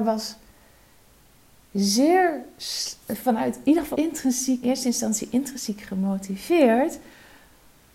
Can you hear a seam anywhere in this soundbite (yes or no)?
yes